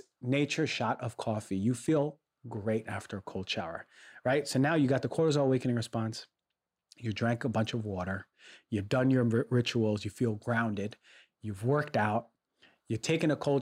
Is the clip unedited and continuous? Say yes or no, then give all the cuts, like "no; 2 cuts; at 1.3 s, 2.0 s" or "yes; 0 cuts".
yes; 0 cuts